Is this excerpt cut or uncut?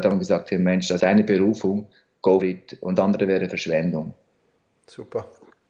cut